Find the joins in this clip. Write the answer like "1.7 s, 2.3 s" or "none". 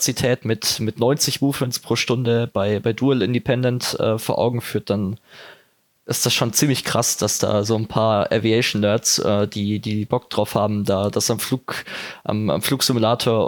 none